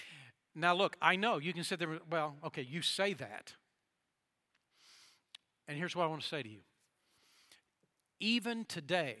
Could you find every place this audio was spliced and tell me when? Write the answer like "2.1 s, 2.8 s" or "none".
none